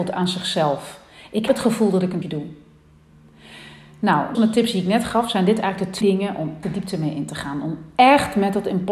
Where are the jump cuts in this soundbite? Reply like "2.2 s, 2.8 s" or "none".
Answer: 1.5 s, 2.2 s, 4.3 s, 6.0 s, 6.6 s